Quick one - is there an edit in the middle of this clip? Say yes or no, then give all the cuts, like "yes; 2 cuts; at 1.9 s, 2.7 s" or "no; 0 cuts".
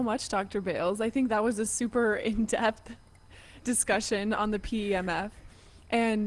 no; 0 cuts